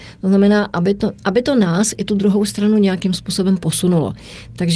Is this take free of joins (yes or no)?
yes